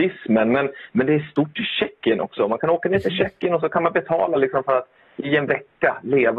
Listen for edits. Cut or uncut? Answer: uncut